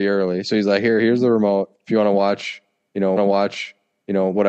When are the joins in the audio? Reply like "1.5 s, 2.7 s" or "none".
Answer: 1.8 s, 3.2 s